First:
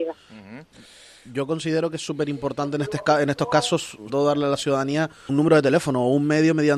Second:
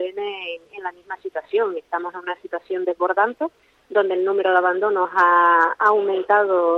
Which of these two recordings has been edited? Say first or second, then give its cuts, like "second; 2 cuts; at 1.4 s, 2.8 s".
first; 2 cuts; at 4.1 s, 5.3 s